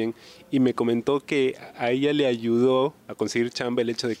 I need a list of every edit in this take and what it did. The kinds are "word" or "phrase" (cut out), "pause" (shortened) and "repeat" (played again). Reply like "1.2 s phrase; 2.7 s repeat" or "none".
3.0 s pause